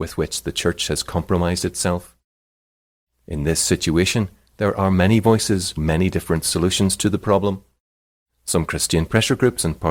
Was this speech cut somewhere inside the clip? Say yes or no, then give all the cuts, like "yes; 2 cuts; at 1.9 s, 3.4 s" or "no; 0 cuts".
yes; 1 cut; at 5.8 s